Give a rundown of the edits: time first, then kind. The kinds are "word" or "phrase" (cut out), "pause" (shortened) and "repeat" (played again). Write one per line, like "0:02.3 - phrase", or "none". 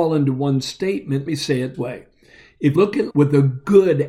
0:01.3 - word
0:01.7 - word
0:02.8 - word
0:03.1 - word